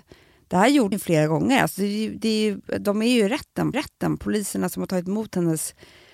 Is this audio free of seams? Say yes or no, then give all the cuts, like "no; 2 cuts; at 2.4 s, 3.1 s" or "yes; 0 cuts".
no; 2 cuts; at 0.9 s, 3.7 s